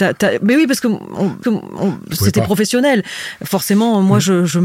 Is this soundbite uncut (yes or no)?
no